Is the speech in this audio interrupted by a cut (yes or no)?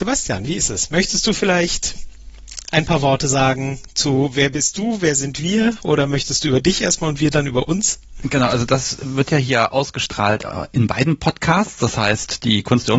no